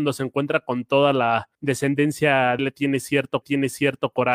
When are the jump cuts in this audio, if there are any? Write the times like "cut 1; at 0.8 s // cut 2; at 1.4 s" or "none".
cut 1; at 1.5 s // cut 2; at 2.6 s // cut 3; at 3.4 s